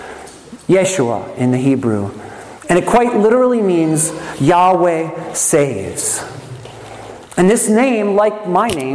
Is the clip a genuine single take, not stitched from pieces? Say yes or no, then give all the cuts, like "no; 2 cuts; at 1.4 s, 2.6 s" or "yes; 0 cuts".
yes; 0 cuts